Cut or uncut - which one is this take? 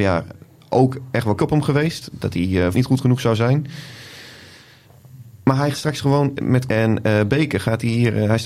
cut